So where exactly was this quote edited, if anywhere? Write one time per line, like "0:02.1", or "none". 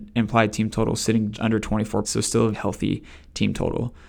0:01.3
0:02.0
0:02.5